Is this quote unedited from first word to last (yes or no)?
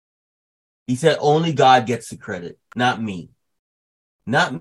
yes